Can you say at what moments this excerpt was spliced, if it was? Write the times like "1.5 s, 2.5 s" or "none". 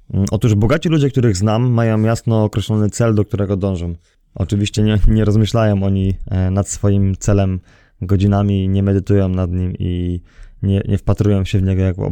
none